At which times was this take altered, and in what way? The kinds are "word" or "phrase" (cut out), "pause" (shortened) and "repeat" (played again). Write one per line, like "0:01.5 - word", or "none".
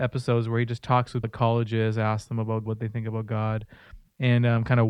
0:01.2 - word
0:02.7 - word